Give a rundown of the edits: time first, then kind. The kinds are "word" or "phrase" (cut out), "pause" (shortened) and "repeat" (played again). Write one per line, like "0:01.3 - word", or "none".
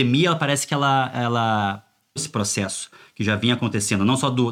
0:02.2 - word